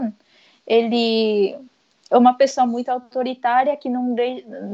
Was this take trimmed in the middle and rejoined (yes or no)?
no